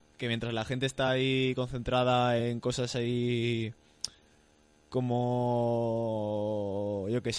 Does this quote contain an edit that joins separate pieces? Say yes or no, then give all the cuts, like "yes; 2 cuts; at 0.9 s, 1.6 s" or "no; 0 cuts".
no; 0 cuts